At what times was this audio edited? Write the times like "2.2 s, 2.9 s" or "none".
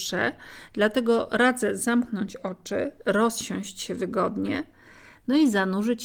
none